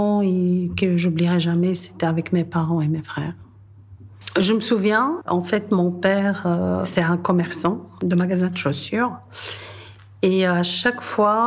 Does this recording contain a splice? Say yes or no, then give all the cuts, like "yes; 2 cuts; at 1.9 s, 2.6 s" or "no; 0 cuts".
no; 0 cuts